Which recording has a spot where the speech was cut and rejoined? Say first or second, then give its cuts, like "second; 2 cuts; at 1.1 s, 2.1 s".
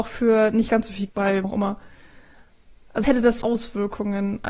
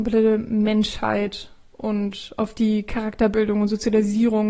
first; 4 cuts; at 1.1 s, 1.4 s, 3.0 s, 3.4 s